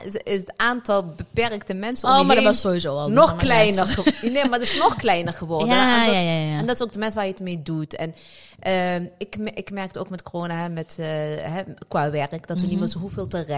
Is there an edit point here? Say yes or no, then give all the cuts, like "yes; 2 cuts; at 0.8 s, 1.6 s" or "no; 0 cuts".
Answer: no; 0 cuts